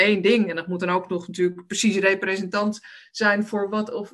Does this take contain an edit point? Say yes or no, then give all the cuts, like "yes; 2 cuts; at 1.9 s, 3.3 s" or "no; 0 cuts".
no; 0 cuts